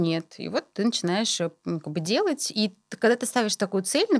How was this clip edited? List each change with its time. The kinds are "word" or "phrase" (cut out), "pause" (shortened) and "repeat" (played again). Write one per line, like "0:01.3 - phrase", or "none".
0:02.8 - pause

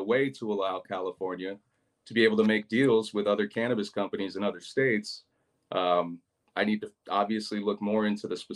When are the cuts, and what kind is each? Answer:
none

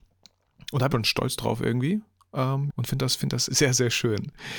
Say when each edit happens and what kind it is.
0:00.9 - word
0:02.7 - word
0:03.5 - word

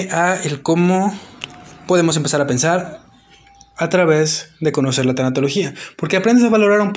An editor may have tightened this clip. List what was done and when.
none

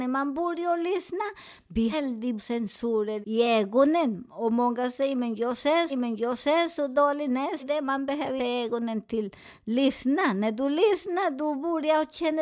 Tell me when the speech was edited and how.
0:01.9 - word
0:02.4 - word
0:03.2 - word
0:05.9 - repeat
0:07.6 - word
0:08.4 - word

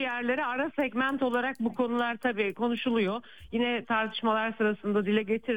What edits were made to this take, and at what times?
none

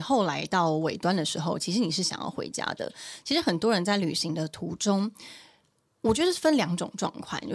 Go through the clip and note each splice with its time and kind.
none

